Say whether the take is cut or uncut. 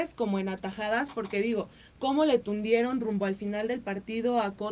uncut